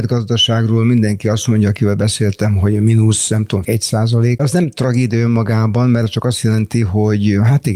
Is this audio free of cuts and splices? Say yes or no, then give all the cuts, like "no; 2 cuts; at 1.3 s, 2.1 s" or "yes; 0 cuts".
no; 2 cuts; at 3.6 s, 4.4 s